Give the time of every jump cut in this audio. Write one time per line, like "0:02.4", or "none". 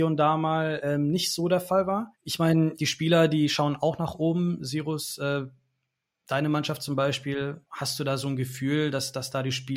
0:02.1
0:02.8
0:07.7